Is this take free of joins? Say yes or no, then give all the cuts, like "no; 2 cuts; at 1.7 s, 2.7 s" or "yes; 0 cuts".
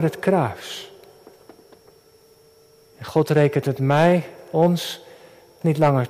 yes; 0 cuts